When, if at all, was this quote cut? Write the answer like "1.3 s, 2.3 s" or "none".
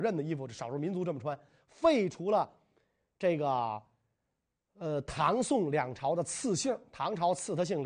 none